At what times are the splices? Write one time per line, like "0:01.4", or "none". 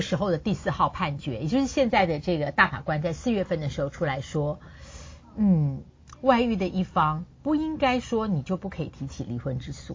0:07.3